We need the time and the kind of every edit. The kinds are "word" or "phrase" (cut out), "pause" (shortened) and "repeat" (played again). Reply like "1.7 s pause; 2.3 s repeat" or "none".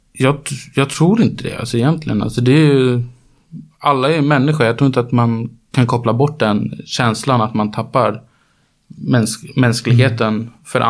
none